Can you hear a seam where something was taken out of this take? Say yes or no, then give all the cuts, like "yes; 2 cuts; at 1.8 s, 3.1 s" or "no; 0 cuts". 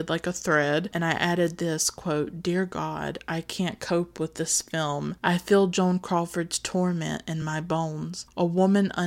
no; 0 cuts